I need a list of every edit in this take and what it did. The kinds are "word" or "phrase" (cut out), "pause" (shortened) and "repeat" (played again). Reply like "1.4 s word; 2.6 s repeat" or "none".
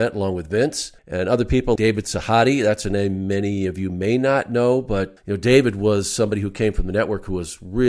1.0 s pause; 1.8 s word; 5.2 s word